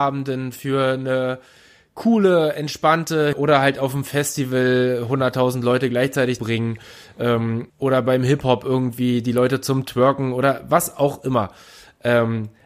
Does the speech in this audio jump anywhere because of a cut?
yes; 3 cuts; at 3.3 s, 6.4 s, 7.7 s

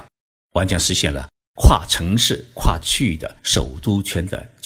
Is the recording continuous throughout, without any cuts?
no; 1 cut; at 3.4 s

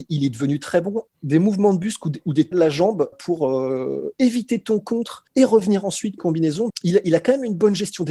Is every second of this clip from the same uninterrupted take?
no; 6 cuts; at 1.1 s, 2.5 s, 3.1 s, 5.3 s, 6.2 s, 6.7 s

